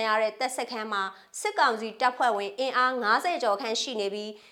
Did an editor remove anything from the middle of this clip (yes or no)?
no